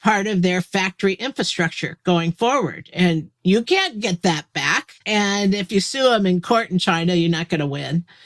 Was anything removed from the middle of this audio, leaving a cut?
yes; 2 cuts; at 3.3 s, 5.0 s

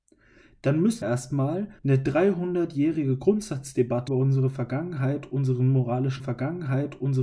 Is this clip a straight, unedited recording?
no; 4 cuts; at 1.0 s, 1.8 s, 4.1 s, 6.2 s

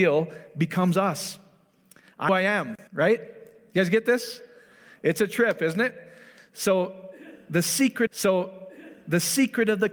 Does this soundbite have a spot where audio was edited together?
yes; 3 cuts; at 2.3 s, 2.9 s, 8.1 s

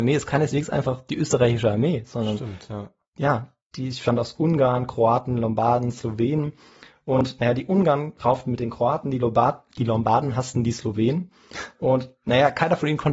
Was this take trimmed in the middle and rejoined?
no; 0 cuts

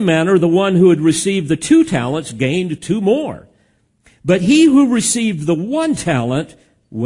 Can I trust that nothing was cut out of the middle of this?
yes; 0 cuts

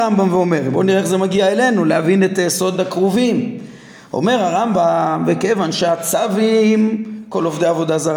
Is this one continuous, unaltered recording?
yes; 0 cuts

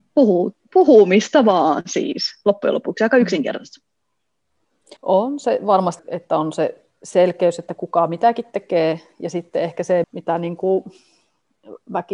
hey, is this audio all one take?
no; 3 cuts; at 5.0 s, 6.0 s, 10.0 s

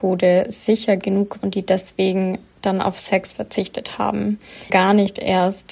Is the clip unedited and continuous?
no; 2 cuts; at 1.4 s, 4.7 s

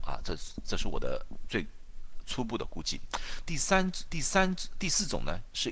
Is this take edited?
yes; 1 cut; at 4.1 s

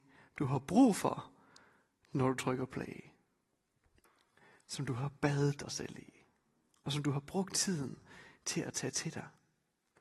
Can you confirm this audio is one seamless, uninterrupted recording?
yes; 0 cuts

